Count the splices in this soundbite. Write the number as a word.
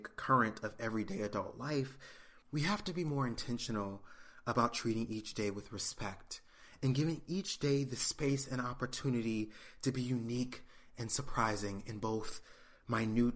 one